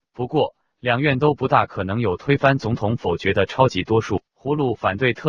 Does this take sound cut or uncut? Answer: cut